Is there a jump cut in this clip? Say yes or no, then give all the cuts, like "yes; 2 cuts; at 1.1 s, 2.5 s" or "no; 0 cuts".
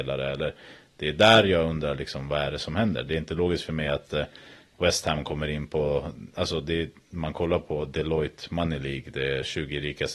no; 0 cuts